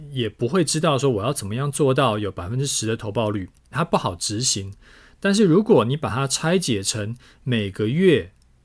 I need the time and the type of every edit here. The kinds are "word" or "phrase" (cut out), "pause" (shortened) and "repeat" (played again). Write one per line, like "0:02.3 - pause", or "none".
0:03.6 - pause